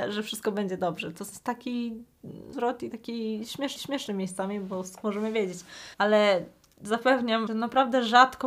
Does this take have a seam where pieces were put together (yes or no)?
yes